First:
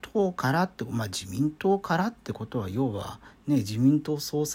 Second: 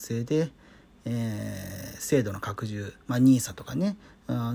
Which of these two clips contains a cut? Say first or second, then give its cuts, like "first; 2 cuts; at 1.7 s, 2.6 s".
second; 1 cut; at 3.0 s